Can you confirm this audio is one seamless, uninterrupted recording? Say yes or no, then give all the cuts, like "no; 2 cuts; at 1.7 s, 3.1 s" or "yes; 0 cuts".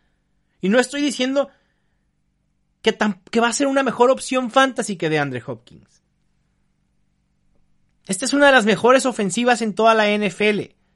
yes; 0 cuts